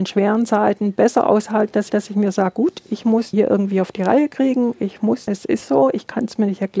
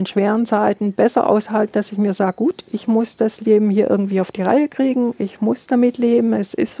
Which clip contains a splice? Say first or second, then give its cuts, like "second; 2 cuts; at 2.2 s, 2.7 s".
first; 3 cuts; at 1.9 s, 3.3 s, 5.3 s